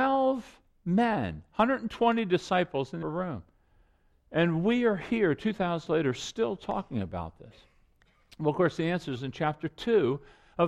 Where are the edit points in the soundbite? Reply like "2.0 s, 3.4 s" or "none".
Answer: 3.0 s, 5.9 s